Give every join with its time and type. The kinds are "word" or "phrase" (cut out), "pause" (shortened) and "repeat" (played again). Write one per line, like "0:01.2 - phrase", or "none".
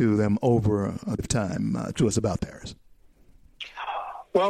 0:01.2 - word
0:01.9 - word
0:02.4 - word